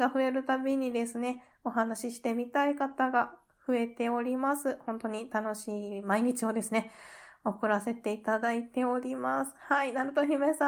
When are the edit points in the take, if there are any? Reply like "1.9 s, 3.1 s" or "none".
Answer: none